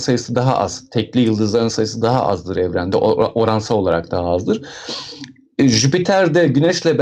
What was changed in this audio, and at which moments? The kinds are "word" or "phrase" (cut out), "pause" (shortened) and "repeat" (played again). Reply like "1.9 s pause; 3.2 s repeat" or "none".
none